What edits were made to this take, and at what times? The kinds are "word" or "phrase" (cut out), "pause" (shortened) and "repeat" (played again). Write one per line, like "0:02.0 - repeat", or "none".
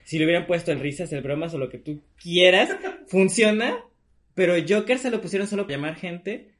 0:05.7 - word

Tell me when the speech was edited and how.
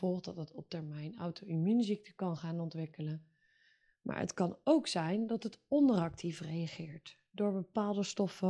none

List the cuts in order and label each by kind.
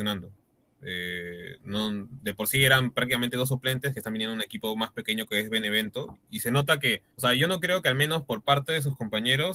0:06.2 - word
0:07.1 - pause

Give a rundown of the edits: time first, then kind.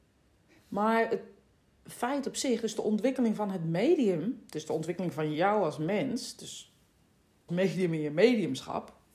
0:07.5 - word

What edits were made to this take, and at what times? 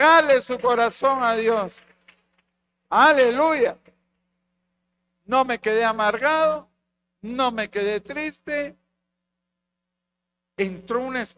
none

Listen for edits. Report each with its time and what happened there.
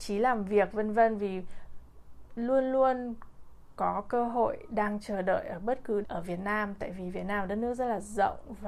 0:06.0 - word

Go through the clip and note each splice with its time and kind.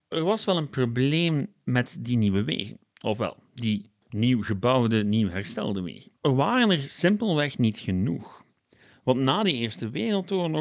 0:06.1 - pause

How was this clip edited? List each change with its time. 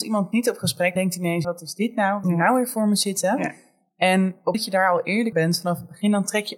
0:01.0 - word
0:01.4 - word
0:02.2 - word
0:04.5 - word
0:05.3 - word

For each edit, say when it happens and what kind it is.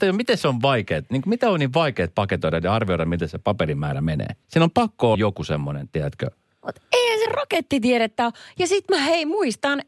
0:04.4 - pause
0:05.1 - word
0:07.3 - phrase

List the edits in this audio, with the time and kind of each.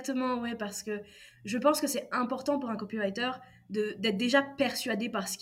none

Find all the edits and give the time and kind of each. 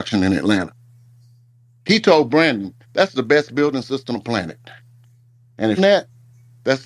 0:02.8 - pause
0:04.1 - word
0:05.8 - phrase

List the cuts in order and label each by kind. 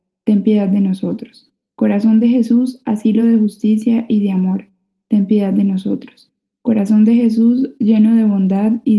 none

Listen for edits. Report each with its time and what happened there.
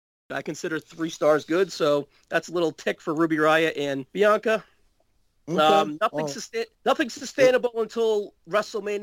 0:04.1 - pause
0:06.7 - pause

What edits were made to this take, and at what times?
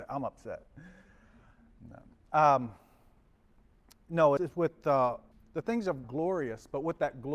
0:04.4 - word
0:05.3 - pause
0:06.0 - phrase

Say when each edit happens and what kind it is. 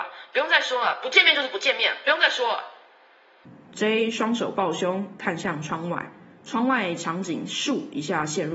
none

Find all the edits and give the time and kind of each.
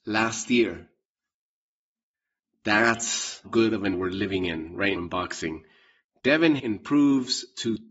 0:03.4 - word
0:03.9 - word
0:05.0 - word
0:06.6 - word

